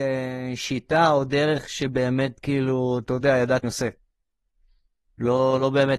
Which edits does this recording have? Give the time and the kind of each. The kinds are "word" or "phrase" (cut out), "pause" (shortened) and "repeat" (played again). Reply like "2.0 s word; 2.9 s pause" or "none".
3.6 s phrase